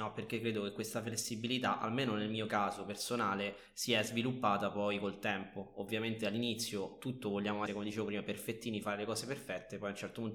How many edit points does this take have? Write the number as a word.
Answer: one